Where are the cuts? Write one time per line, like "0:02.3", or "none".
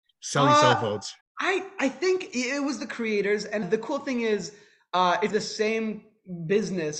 0:01.2
0:03.6
0:05.3